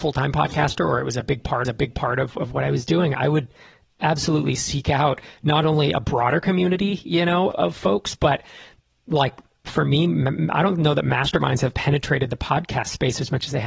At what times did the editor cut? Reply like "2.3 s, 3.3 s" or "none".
1.6 s, 7.5 s